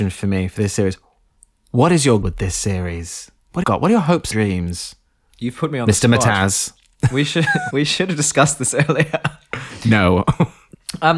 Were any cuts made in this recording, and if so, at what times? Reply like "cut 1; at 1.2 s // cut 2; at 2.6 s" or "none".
cut 1; at 2.2 s // cut 2; at 3.6 s // cut 3; at 4.3 s // cut 4; at 7.7 s